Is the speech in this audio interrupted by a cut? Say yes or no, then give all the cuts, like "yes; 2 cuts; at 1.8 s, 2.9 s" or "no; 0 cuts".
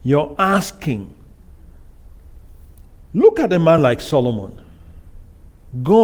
no; 0 cuts